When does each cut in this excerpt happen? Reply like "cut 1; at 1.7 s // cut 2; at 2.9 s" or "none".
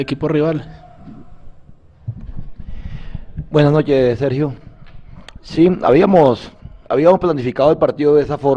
cut 1; at 6.8 s